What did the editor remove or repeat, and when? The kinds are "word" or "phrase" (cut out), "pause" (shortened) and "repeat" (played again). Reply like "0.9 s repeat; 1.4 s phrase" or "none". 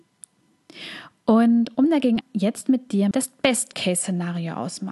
2.2 s phrase; 3.1 s word